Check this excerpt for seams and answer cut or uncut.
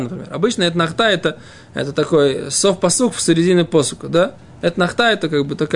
uncut